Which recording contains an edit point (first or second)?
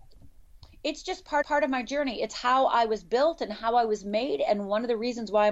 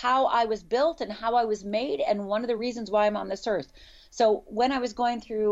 first